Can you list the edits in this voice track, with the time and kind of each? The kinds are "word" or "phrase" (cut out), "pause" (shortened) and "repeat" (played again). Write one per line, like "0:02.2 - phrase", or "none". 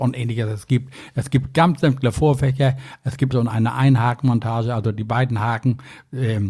0:03.3 - phrase